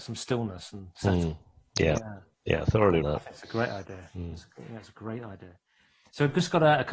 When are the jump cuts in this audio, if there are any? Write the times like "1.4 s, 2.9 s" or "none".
3.0 s